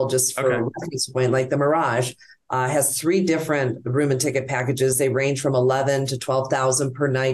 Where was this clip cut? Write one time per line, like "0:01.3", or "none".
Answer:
none